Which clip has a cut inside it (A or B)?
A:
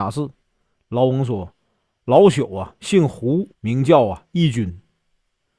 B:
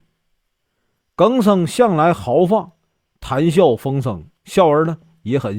A